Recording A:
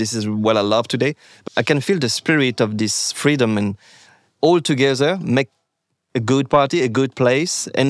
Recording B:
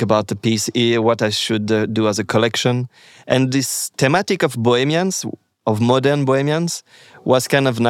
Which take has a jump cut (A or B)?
A